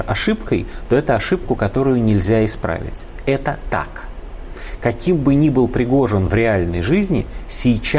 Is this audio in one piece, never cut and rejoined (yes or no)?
yes